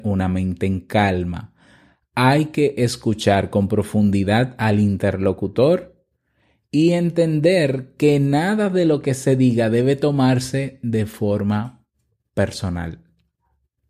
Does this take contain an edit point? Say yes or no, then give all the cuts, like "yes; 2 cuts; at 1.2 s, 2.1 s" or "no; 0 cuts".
no; 0 cuts